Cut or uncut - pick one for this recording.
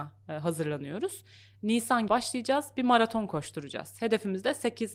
cut